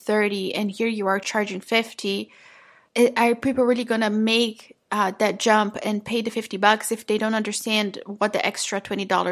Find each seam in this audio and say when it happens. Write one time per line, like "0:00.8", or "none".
none

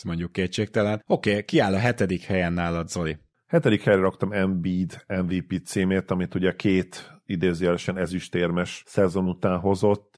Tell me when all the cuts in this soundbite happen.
none

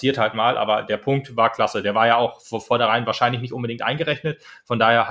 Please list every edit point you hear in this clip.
none

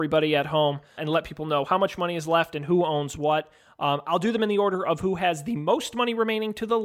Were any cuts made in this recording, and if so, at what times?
0:01.0

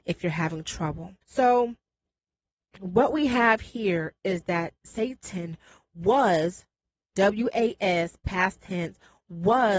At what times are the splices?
0:01.2

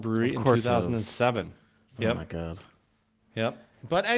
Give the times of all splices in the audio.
none

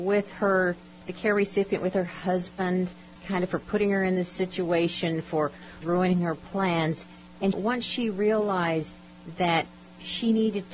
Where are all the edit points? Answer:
0:03.2
0:05.8
0:07.5

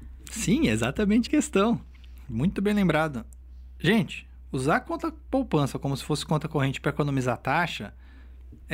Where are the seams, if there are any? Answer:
0:01.3

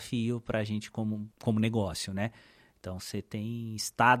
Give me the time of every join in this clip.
0:01.3

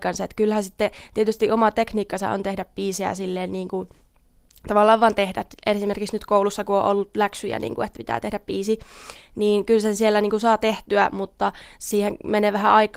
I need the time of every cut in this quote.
none

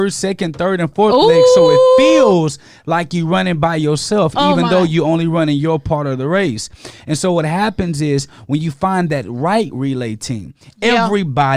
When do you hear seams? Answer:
none

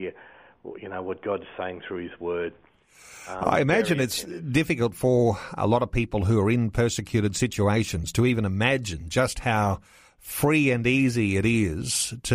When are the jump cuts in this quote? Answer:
none

